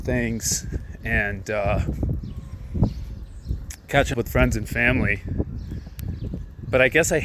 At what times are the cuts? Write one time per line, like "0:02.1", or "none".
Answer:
0:04.1